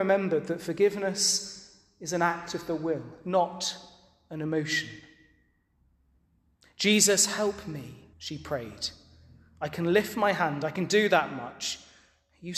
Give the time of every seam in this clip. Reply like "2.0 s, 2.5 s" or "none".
8.1 s

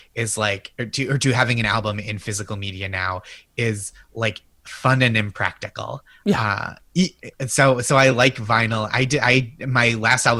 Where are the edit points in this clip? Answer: none

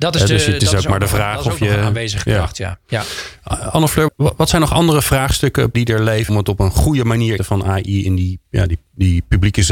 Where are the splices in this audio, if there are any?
4.1 s, 5.7 s, 6.3 s, 7.4 s

